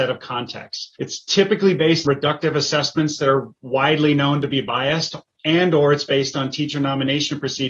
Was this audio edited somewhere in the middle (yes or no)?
yes